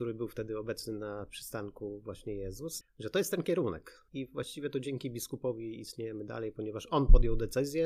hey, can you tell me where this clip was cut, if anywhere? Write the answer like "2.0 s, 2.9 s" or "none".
2.8 s, 4.1 s